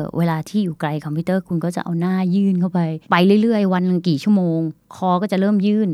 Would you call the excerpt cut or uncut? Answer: cut